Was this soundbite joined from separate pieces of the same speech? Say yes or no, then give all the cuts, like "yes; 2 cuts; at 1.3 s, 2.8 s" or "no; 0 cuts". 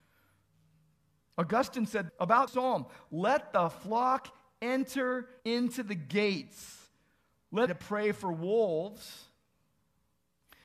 yes; 4 cuts; at 2.1 s, 2.5 s, 5.4 s, 7.7 s